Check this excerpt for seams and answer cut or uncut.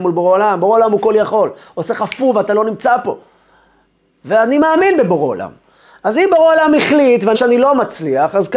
cut